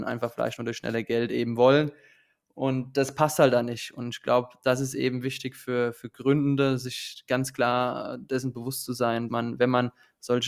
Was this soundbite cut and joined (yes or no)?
yes